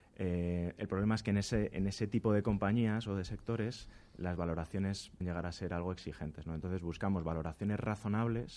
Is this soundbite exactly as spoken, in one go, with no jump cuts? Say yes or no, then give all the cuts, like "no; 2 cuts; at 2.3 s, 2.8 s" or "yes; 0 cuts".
no; 1 cut; at 5.2 s